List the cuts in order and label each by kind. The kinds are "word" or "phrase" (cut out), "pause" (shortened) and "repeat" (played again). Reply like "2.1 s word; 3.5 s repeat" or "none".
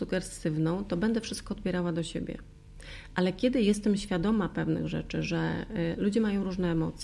none